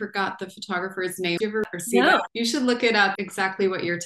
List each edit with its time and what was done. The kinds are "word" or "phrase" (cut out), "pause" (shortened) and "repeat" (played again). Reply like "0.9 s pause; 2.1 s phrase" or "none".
1.4 s phrase; 3.2 s word